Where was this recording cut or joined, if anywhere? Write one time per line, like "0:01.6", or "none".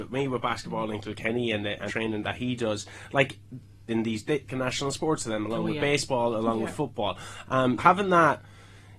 0:01.9
0:03.9
0:04.5
0:07.8